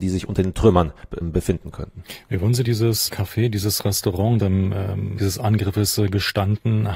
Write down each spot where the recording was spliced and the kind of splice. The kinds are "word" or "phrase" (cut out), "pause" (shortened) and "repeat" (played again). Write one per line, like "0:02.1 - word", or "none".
0:01.2 - word
0:02.6 - word
0:03.1 - word
0:04.4 - word
0:05.2 - word